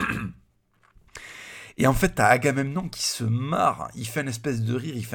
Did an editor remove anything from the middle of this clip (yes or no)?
no